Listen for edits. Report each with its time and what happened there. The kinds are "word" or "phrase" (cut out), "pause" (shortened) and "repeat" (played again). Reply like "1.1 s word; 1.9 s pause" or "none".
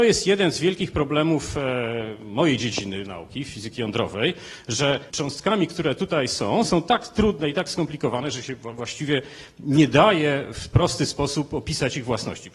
5.1 s phrase